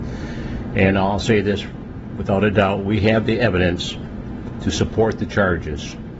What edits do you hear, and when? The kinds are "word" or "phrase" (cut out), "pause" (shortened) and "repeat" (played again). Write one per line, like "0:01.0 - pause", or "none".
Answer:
none